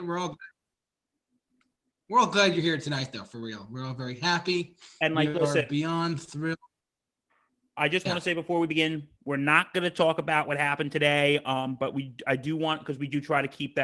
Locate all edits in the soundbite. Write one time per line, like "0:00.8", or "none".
none